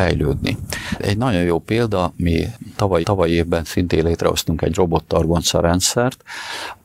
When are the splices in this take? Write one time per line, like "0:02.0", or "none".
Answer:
0:03.0